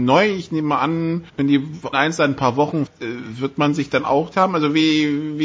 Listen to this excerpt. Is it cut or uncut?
cut